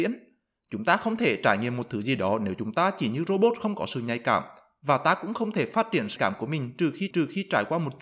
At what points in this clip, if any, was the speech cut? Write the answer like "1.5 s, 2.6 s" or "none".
6.2 s, 7.1 s

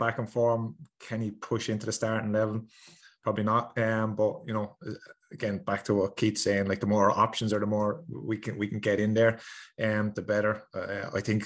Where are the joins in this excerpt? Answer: none

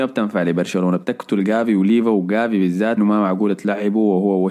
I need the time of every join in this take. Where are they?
3.0 s

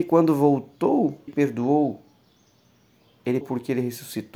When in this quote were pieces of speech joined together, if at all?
1.3 s, 3.4 s

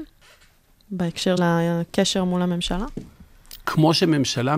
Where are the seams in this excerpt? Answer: 1.4 s

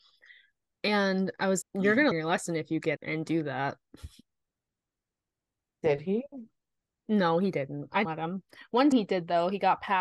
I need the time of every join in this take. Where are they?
1.6 s, 2.1 s, 3.0 s, 8.0 s, 8.9 s

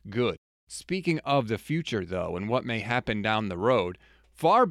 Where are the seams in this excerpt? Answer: none

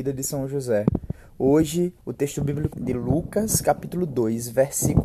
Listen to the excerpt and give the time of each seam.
2.0 s, 2.7 s

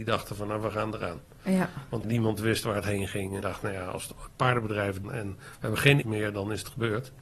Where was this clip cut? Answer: 2.0 s, 3.4 s, 5.0 s, 6.0 s

